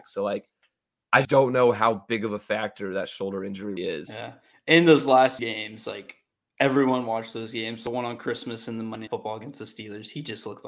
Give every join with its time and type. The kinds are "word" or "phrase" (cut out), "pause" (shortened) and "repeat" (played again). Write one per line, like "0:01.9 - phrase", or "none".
0:01.2 - word
0:03.8 - word
0:05.4 - word
0:09.1 - word